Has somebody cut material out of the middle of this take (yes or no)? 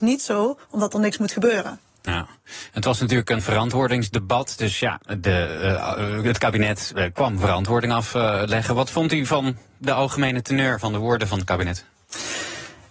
yes